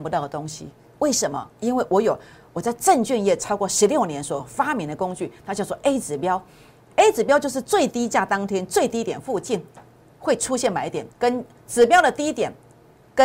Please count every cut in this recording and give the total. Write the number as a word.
two